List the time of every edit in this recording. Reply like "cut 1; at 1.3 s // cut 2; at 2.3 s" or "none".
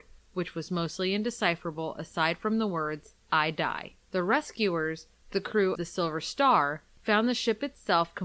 cut 1; at 3.2 s // cut 2; at 5.7 s